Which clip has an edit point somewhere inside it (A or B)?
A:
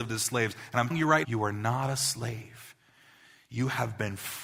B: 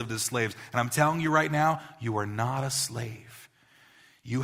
A